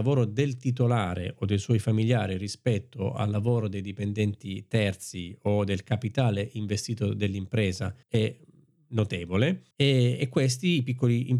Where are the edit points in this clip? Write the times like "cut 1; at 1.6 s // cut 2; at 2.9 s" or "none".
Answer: cut 1; at 8.0 s // cut 2; at 9.7 s